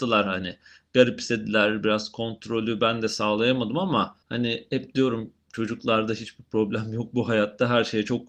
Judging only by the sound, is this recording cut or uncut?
cut